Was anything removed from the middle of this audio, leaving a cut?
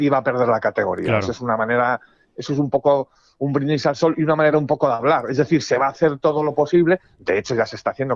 no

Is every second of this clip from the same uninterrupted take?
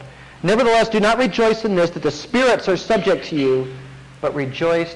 yes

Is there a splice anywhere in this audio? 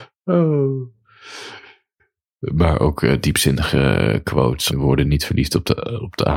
yes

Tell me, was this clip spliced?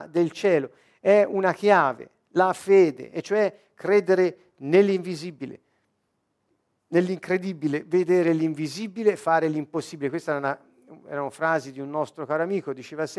no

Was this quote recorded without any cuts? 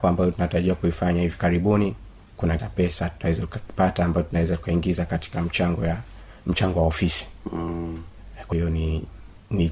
no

